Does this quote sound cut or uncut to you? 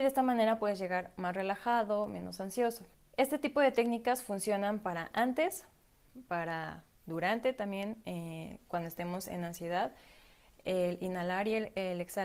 cut